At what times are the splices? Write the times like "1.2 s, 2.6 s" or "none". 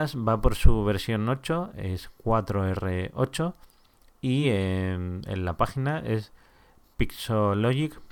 none